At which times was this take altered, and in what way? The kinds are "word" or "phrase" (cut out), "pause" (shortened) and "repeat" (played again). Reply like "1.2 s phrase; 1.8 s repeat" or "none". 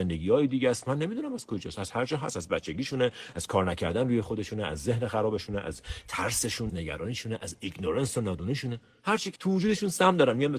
6.7 s word; 9.4 s word